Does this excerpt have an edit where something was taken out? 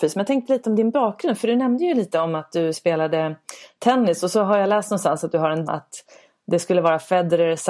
yes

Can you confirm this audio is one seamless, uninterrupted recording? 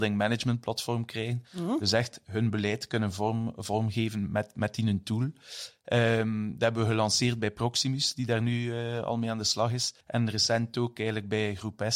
no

